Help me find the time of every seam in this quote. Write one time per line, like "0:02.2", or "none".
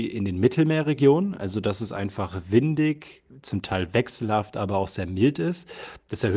0:03.3